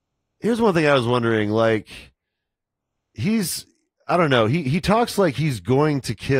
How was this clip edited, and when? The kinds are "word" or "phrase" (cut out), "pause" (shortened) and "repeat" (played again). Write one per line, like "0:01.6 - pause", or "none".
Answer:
none